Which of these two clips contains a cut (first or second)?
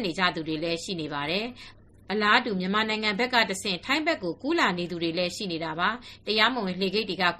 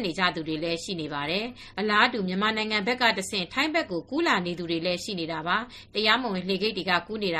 second